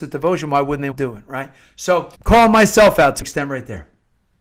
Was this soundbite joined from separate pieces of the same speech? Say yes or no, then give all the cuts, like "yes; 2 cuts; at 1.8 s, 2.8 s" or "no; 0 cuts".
yes; 3 cuts; at 0.9 s, 2.1 s, 3.2 s